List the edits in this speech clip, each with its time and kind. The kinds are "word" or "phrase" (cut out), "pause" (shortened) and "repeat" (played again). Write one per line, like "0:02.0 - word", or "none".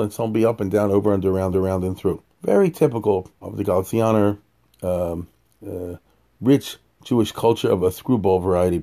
0:01.5 - repeat
0:02.3 - pause
0:03.3 - pause
0:05.4 - pause

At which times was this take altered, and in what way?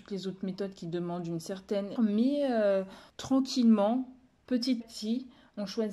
0:02.0 - word
0:03.1 - pause
0:04.8 - word

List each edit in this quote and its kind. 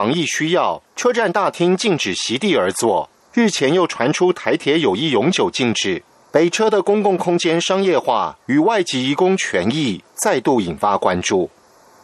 none

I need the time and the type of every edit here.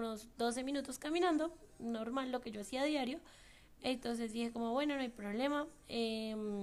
none

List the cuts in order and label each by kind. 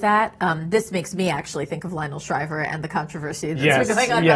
none

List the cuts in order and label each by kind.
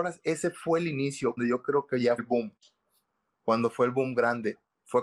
0:01.4 - word
0:02.2 - word

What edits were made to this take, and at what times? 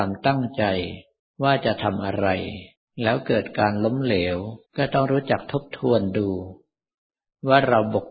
0:01.2 - pause
0:02.8 - pause
0:04.7 - pause

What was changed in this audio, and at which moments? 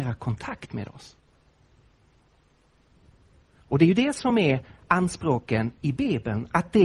none

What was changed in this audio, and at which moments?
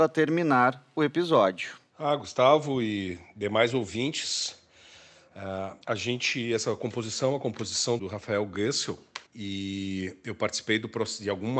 0:05.8 - pause
0:08.0 - word
0:09.3 - pause

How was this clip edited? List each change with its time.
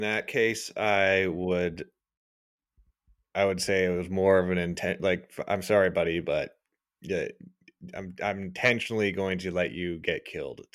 none

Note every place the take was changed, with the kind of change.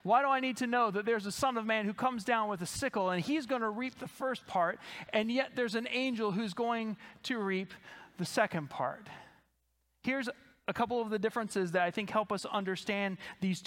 none

